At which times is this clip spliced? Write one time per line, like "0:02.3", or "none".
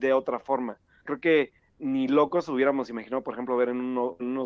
0:01.0
0:01.8

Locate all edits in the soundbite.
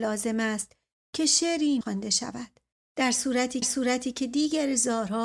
0:01.8
0:02.7
0:03.6

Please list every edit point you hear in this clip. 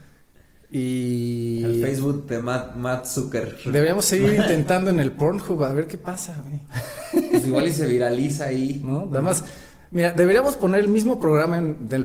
none

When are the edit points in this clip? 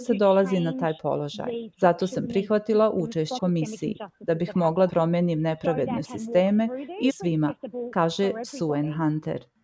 0:01.7
0:03.4
0:04.9
0:06.0
0:07.1

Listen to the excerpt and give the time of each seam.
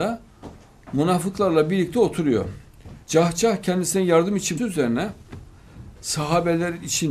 0:03.0
0:04.6

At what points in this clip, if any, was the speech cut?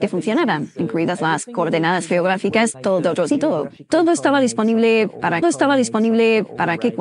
0:02.7
0:03.3
0:05.4

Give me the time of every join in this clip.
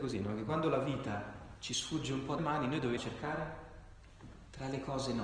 0:02.4
0:03.0

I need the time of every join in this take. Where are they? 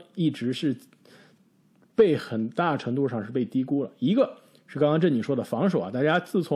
none

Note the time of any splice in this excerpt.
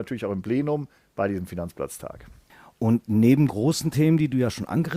0:03.5

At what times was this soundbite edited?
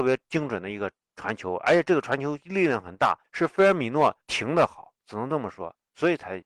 0:01.0
0:03.2
0:04.2

